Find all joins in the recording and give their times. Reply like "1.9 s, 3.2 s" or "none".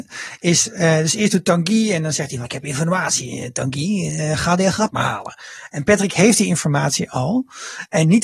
2.5 s, 4.9 s